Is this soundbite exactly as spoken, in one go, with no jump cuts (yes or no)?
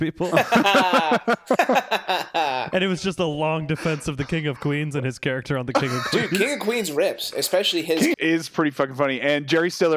no